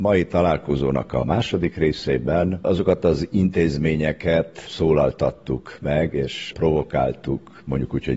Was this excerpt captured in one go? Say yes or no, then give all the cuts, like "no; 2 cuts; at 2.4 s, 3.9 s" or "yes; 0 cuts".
yes; 0 cuts